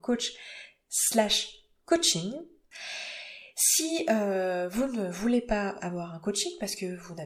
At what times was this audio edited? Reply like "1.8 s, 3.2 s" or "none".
5.8 s